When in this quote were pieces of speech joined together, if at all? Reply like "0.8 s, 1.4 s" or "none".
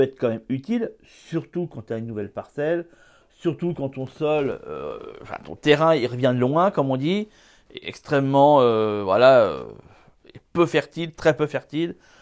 none